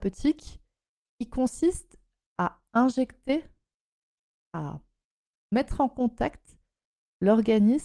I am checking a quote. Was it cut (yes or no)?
no